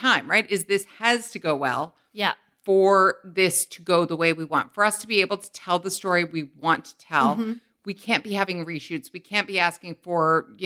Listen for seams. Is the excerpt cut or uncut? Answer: uncut